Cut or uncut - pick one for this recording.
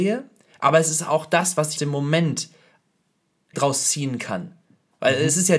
cut